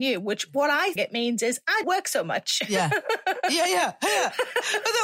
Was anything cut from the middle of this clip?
yes; 2 cuts; at 1.0 s, 1.8 s

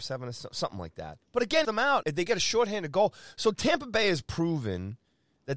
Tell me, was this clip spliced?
yes; 3 cuts; at 1.2 s, 1.6 s, 2.0 s

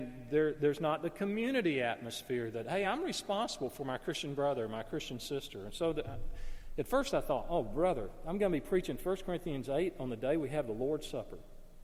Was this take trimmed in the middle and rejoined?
no; 0 cuts

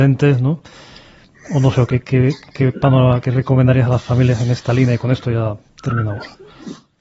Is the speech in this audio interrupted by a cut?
no; 0 cuts

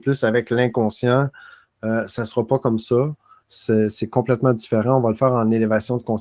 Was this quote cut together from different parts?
no; 0 cuts

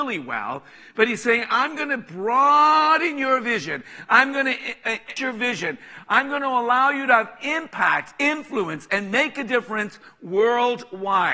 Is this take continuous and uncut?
no; 1 cut; at 5.2 s

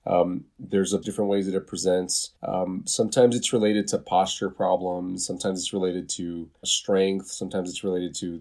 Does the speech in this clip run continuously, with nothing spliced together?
no; 3 cuts; at 1.0 s, 2.4 s, 6.6 s

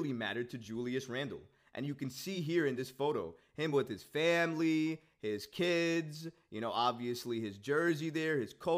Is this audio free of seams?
yes; 0 cuts

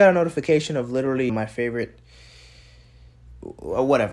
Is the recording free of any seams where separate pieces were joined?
no; 1 cut; at 1.3 s

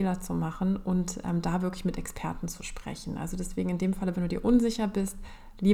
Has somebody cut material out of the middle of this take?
yes; 1 cut; at 4.1 s

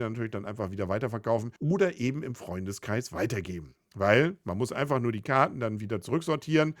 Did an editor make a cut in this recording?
yes; 1 cut; at 1.6 s

